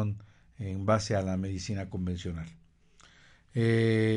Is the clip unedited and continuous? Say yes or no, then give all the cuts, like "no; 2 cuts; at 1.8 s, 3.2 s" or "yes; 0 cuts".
yes; 0 cuts